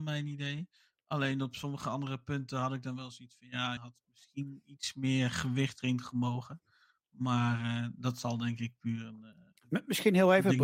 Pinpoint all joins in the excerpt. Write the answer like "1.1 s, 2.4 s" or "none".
3.8 s